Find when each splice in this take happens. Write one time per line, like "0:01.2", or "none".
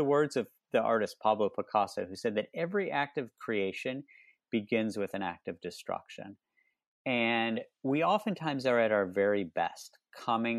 none